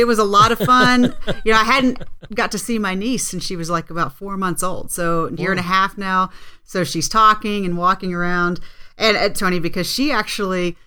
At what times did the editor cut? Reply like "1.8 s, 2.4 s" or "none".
5.4 s, 9.4 s